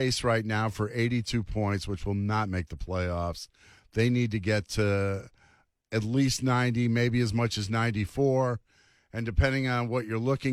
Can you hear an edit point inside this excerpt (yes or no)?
no